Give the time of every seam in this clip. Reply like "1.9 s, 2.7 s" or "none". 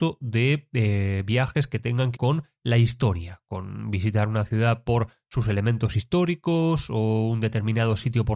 2.2 s